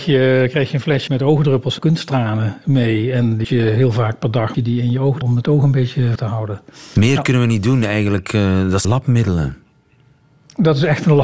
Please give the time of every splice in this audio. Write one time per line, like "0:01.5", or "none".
0:01.1
0:01.8
0:03.4
0:04.5
0:05.2
0:06.2
0:08.8